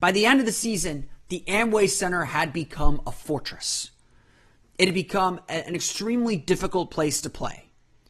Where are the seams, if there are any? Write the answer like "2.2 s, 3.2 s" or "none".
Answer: none